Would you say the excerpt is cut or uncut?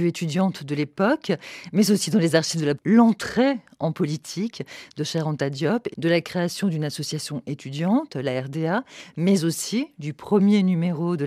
cut